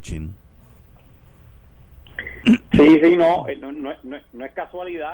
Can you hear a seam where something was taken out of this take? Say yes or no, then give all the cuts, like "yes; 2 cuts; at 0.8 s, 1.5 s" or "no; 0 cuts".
no; 0 cuts